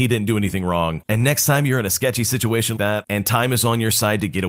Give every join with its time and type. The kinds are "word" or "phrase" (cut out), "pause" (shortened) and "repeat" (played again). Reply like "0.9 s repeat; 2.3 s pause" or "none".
2.8 s word